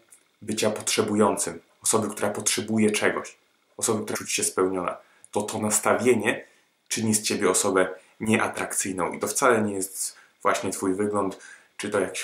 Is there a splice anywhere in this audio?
yes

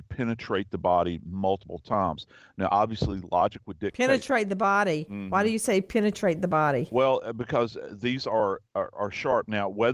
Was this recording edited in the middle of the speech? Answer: no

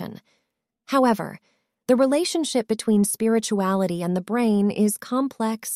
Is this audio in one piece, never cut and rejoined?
yes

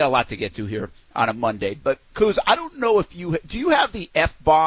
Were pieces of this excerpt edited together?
yes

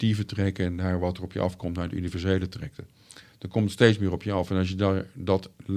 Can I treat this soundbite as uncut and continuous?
yes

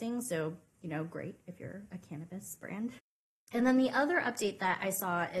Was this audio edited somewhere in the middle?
no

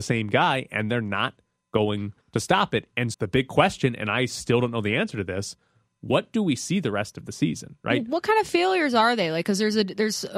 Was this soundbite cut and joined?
yes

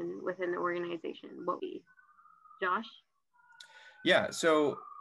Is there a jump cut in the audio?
yes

